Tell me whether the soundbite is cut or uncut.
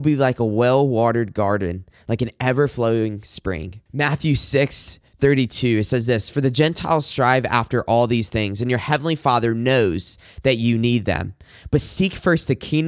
cut